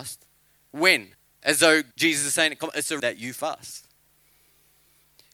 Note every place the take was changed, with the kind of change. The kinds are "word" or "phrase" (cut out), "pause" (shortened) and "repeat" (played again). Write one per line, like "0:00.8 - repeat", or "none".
0:01.1 - pause
0:01.9 - pause
0:03.0 - word